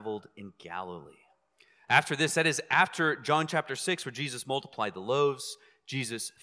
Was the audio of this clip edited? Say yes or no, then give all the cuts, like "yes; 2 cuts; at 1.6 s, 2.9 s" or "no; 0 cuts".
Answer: no; 0 cuts